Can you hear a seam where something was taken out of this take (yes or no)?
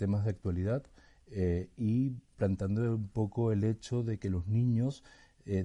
no